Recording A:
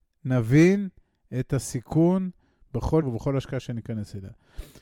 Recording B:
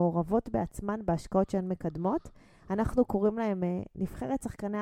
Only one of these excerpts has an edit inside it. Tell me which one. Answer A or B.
A